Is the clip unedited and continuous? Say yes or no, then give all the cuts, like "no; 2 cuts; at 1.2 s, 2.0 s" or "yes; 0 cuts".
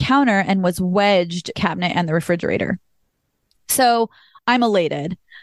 no; 1 cut; at 1.5 s